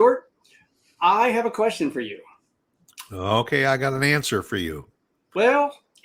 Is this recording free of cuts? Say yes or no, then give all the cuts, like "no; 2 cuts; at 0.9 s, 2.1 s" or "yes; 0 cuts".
yes; 0 cuts